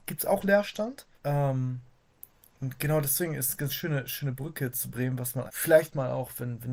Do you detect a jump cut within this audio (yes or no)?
yes